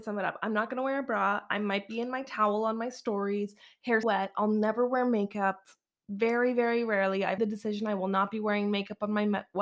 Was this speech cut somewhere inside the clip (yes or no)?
yes